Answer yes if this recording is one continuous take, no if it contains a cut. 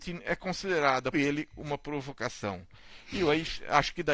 no